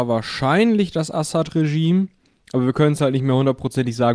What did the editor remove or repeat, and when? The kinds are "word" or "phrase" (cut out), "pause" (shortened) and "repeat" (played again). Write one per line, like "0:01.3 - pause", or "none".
none